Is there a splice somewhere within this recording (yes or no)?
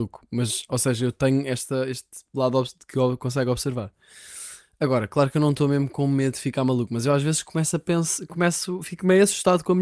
no